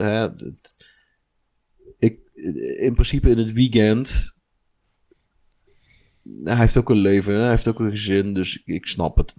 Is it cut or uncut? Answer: uncut